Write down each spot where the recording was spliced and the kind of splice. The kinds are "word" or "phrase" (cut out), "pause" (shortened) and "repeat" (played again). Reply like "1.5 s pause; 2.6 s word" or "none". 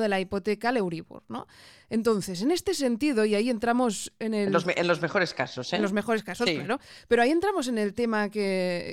none